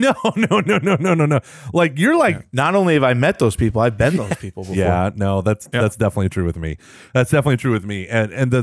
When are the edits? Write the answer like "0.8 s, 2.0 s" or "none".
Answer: none